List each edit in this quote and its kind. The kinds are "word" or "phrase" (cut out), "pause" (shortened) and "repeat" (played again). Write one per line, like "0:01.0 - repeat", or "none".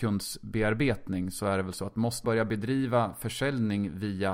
0:02.2 - word